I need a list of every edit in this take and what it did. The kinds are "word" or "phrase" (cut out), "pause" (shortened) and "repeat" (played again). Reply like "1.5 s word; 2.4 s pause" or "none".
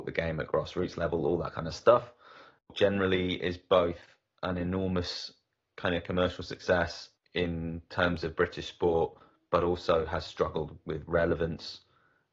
none